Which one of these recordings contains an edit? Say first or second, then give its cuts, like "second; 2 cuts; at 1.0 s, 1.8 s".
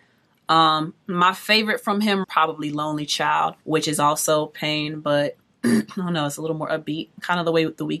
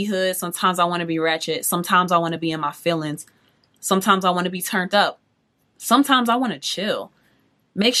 first; 4 cuts; at 1.0 s, 2.2 s, 3.6 s, 5.4 s